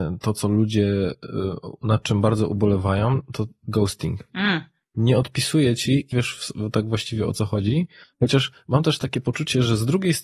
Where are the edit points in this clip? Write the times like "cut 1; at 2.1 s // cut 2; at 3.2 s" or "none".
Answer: cut 1; at 4.3 s // cut 2; at 6.1 s